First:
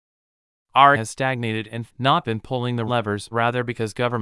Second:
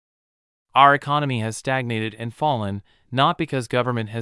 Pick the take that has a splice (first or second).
first